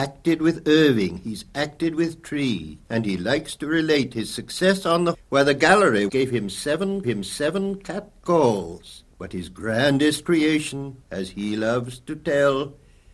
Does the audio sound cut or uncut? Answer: cut